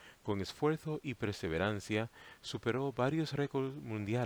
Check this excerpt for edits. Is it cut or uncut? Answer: uncut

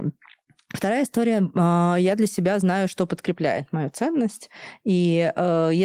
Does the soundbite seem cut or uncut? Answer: uncut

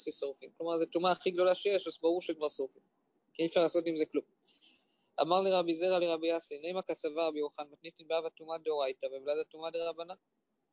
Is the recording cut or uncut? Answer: uncut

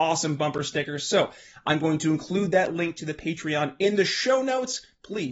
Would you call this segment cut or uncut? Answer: uncut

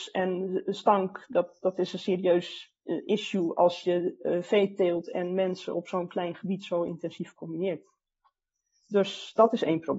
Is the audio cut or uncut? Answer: uncut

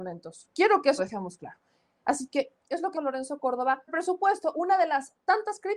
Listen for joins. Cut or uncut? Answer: cut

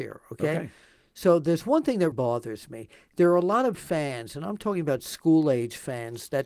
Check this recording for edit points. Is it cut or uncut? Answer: cut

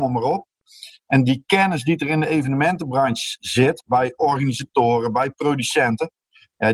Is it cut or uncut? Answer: uncut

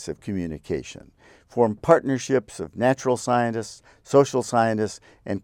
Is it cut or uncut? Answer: uncut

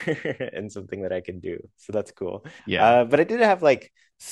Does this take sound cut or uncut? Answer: cut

